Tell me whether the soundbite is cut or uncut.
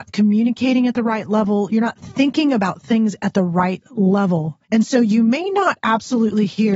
cut